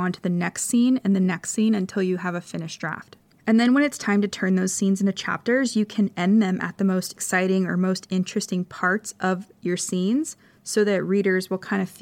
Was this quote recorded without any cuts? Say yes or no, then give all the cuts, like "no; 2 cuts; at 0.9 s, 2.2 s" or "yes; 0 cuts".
yes; 0 cuts